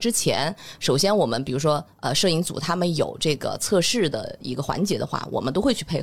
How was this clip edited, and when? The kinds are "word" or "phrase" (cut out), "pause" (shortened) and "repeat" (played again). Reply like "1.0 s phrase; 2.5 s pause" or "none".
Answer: none